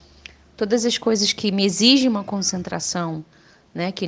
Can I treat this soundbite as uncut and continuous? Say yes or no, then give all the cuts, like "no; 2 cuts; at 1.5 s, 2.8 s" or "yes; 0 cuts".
yes; 0 cuts